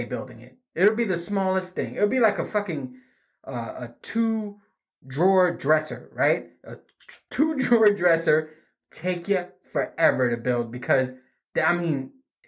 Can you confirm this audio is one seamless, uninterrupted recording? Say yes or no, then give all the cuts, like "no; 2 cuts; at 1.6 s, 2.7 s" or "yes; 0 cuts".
yes; 0 cuts